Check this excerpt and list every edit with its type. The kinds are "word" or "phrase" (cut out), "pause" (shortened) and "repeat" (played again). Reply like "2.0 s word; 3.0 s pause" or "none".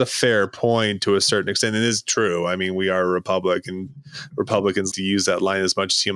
4.9 s word